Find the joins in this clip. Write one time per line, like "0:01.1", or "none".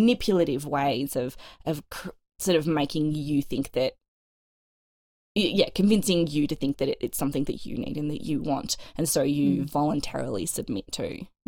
none